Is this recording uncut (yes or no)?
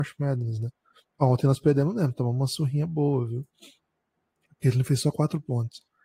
yes